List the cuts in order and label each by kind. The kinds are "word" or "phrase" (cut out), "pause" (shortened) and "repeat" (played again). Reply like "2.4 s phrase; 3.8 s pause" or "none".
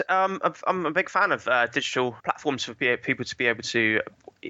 2.2 s pause